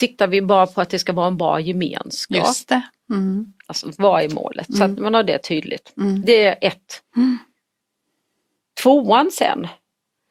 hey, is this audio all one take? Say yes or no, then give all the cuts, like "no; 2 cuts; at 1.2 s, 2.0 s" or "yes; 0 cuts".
yes; 0 cuts